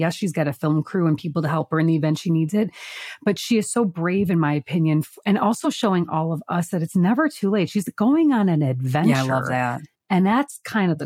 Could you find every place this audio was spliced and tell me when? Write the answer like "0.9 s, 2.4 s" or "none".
none